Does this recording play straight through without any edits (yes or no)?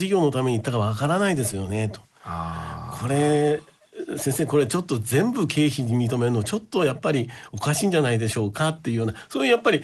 yes